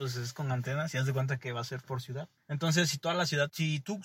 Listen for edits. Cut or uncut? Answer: uncut